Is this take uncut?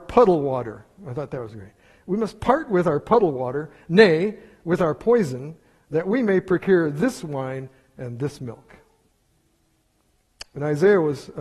yes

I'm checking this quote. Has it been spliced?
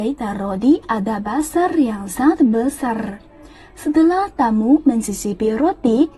no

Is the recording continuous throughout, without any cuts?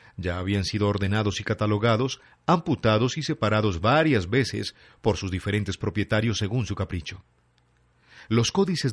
yes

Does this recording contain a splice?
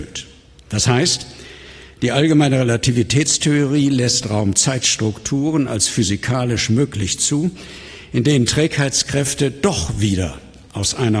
no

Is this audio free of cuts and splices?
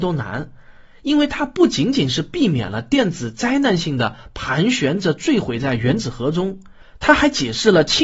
yes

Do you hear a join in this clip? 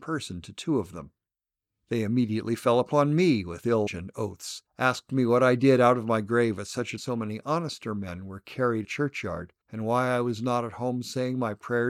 yes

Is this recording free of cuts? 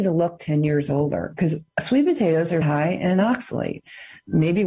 no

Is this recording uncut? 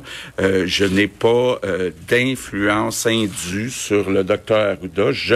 yes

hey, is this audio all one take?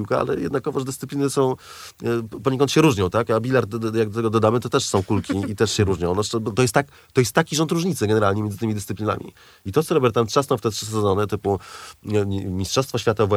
yes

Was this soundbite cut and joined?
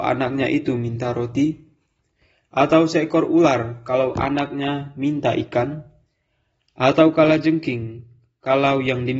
no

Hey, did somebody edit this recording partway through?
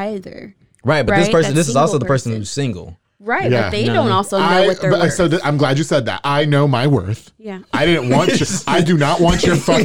no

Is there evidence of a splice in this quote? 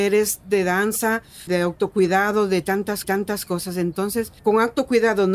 yes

